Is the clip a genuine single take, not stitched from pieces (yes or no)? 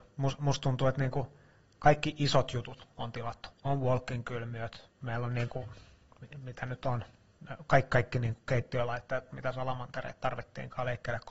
yes